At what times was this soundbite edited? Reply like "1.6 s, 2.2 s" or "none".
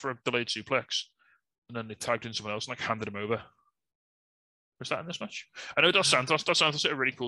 none